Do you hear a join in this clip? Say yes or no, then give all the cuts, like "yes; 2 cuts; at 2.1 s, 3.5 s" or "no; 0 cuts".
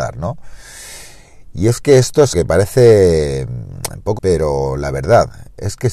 yes; 2 cuts; at 2.3 s, 4.2 s